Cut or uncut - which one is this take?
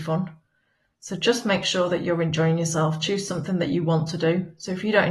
uncut